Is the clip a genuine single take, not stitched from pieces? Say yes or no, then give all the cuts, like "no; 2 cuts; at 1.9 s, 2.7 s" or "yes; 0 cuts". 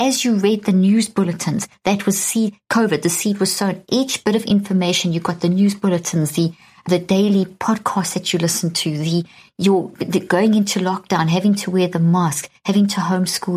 yes; 0 cuts